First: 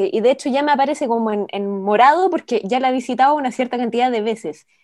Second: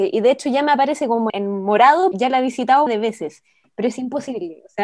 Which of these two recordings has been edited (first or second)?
second